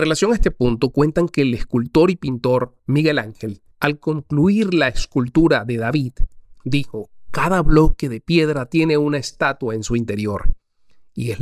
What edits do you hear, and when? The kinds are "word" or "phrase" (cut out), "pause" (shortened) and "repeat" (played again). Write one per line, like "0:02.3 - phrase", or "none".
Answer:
0:02.8 - pause
0:03.7 - pause